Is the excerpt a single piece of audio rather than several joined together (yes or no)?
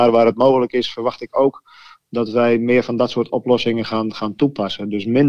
yes